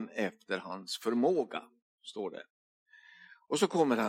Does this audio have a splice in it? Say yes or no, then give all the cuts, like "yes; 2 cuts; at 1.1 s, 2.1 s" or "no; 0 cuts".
no; 0 cuts